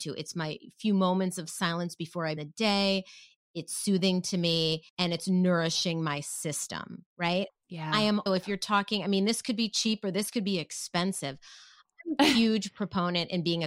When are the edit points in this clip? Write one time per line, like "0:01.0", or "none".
0:02.4
0:04.9
0:07.1
0:08.3